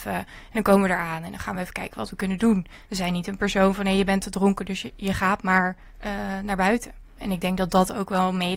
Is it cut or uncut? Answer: uncut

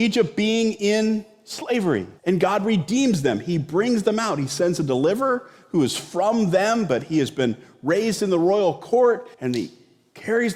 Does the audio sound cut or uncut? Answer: cut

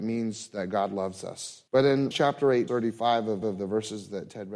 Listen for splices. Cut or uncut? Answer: cut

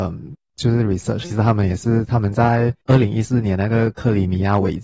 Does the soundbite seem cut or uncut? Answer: cut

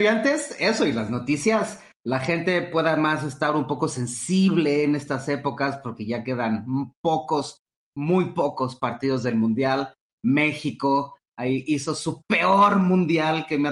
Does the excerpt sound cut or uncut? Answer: uncut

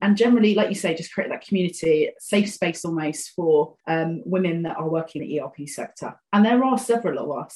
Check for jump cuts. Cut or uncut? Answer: cut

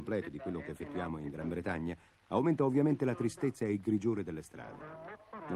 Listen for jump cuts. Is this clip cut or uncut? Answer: uncut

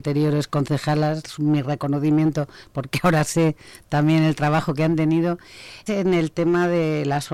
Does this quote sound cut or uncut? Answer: cut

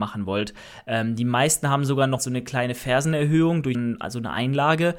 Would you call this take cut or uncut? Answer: cut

